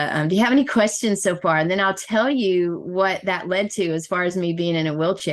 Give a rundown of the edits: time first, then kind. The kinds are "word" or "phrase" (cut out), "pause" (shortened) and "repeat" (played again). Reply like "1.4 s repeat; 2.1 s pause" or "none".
none